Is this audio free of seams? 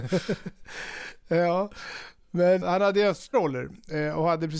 no; 2 cuts; at 2.6 s, 3.3 s

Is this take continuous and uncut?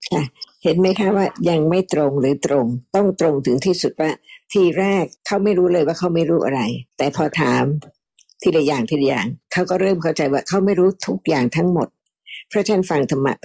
no; 2 cuts; at 5.2 s, 6.9 s

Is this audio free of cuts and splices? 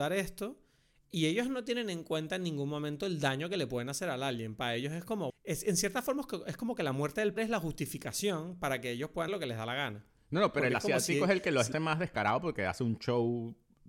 no; 4 cuts; at 5.3 s, 7.4 s, 9.3 s, 11.7 s

